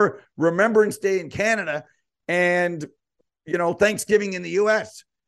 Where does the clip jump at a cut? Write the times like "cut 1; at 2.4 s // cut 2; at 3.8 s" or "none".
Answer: none